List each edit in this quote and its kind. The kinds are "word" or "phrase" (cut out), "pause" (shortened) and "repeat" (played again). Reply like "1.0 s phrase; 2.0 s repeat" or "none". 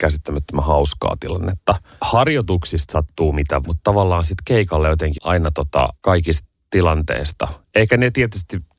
3.6 s word; 5.2 s word; 6.0 s pause